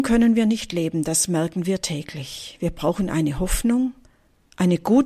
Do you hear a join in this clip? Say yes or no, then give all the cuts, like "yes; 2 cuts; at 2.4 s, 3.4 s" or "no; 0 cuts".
no; 0 cuts